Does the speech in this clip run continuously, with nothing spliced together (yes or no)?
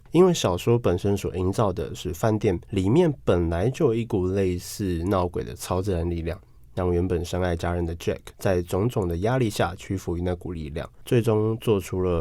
no